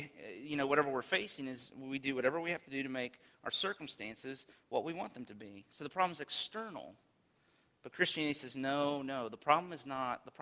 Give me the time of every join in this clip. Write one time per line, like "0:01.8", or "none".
none